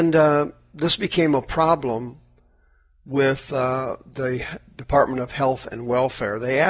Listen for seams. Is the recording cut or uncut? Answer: uncut